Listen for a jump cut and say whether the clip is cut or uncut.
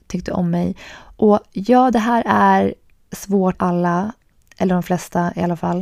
cut